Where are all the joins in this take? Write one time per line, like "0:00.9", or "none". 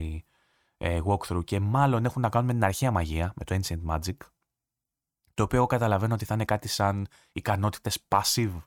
none